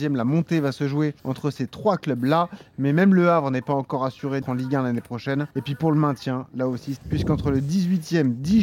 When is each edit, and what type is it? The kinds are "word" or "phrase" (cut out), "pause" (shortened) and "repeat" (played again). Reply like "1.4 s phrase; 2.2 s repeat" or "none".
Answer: 1.2 s pause; 4.4 s word; 5.5 s pause; 7.0 s phrase

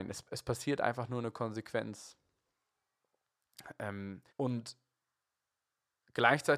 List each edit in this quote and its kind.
4.3 s pause

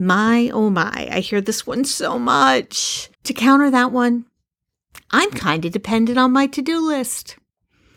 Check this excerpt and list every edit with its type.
3.1 s pause

